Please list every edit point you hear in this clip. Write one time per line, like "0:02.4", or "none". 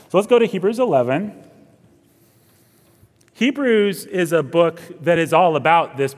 none